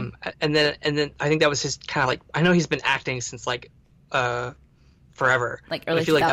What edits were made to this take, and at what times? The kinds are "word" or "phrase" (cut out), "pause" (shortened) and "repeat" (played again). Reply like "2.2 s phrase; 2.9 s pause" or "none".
none